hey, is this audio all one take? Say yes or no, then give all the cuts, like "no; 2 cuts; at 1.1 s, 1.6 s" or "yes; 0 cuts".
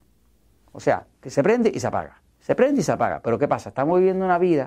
no; 1 cut; at 1.1 s